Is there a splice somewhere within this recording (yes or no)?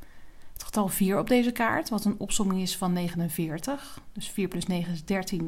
no